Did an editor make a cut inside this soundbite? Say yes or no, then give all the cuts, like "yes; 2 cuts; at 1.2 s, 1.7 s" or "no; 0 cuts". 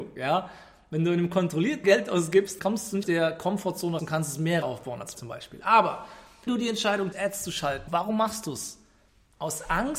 yes; 9 cuts; at 1.8 s, 2.6 s, 3.0 s, 4.0 s, 4.6 s, 5.1 s, 6.5 s, 7.1 s, 7.9 s